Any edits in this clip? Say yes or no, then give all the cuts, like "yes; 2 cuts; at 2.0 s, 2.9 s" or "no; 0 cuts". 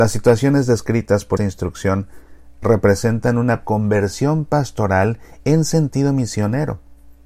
yes; 2 cuts; at 1.4 s, 3.6 s